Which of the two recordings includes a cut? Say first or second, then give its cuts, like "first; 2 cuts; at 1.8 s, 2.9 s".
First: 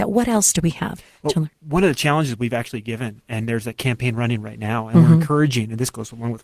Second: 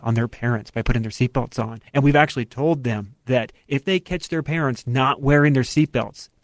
second; 1 cut; at 1.9 s